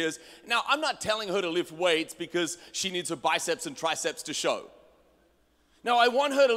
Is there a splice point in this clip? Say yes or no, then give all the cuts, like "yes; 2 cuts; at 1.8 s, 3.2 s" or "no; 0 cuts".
no; 0 cuts